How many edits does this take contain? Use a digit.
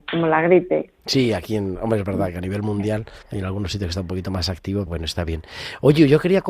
2